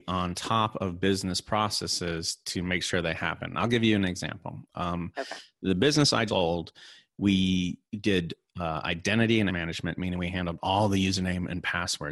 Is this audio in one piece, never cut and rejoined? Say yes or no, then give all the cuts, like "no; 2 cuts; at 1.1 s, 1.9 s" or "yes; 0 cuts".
no; 3 cuts; at 6.3 s, 7.9 s, 9.5 s